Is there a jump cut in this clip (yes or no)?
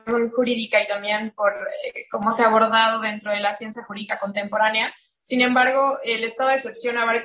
no